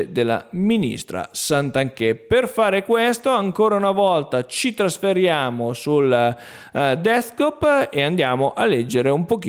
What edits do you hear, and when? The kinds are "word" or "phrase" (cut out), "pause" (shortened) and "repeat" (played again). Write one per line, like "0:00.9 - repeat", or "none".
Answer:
none